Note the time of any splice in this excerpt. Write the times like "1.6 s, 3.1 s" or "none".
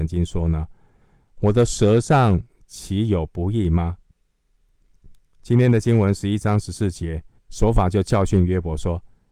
4.1 s, 7.4 s